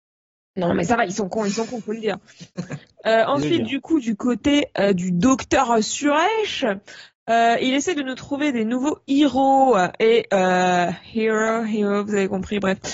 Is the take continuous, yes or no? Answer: yes